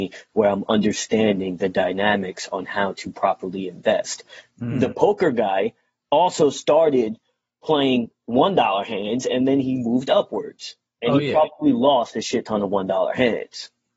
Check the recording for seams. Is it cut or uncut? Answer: uncut